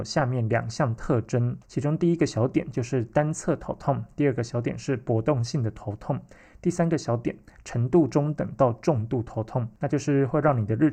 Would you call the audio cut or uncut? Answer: uncut